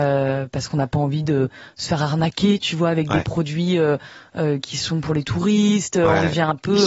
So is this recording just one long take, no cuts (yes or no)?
yes